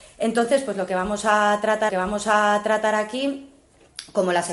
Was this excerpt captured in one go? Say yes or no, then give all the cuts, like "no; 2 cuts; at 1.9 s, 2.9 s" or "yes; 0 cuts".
no; 1 cut; at 1.9 s